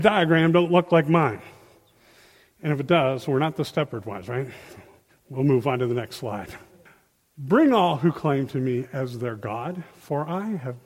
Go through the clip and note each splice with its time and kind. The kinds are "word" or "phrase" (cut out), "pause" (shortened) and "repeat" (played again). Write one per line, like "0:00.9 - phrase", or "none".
none